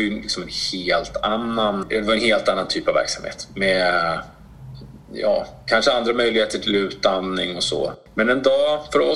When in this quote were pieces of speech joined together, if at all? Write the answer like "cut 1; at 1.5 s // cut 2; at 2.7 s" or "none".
none